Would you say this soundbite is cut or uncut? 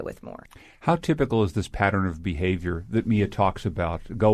uncut